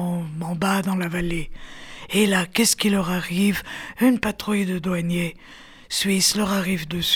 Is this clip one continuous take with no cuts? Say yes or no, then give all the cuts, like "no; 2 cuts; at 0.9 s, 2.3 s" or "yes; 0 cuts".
yes; 0 cuts